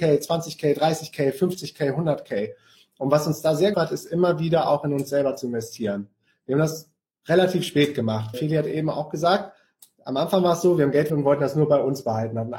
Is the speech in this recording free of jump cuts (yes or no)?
no